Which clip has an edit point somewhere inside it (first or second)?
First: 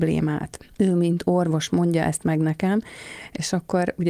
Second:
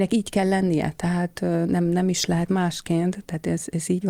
second